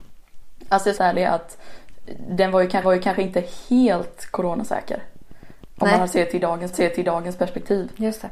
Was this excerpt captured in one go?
no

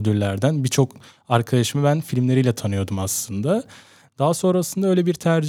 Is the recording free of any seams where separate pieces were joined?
yes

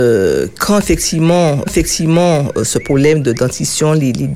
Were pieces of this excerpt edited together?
yes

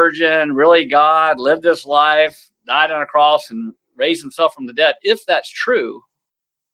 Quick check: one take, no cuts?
no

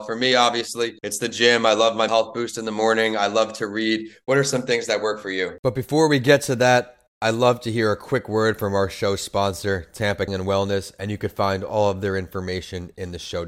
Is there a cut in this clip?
yes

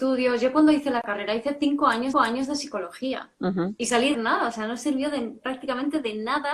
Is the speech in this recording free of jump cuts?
no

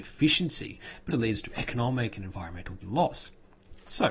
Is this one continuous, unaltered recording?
no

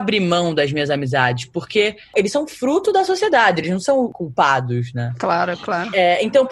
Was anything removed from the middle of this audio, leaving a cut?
no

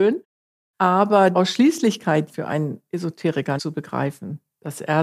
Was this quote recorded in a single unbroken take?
no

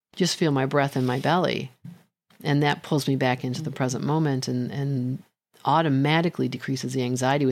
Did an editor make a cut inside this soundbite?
no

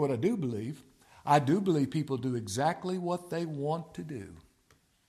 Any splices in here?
no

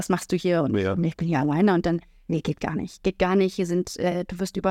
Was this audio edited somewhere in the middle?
no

